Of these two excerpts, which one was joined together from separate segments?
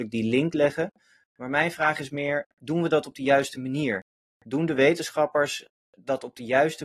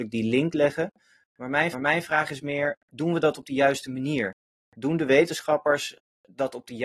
second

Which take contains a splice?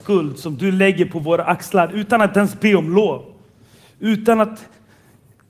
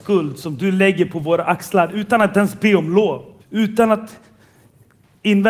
second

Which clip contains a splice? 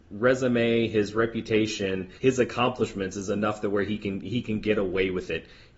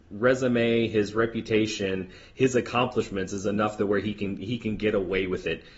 first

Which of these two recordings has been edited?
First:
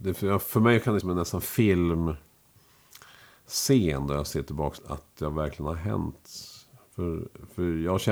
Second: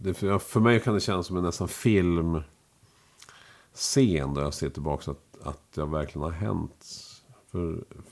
first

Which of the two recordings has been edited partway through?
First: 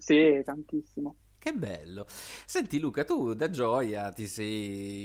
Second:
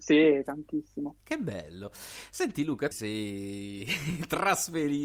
second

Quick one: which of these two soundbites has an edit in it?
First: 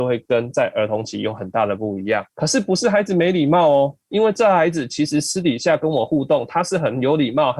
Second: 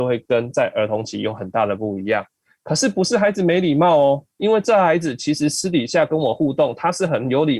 first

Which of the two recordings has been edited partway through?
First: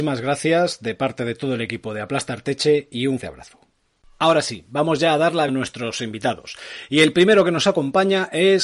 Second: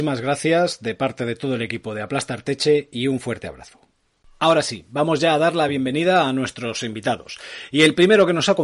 first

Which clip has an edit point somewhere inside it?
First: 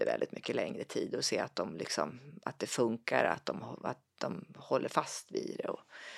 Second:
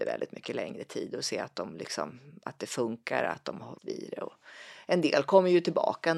second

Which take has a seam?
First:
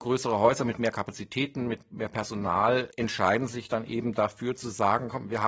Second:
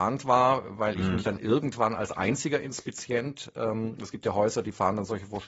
first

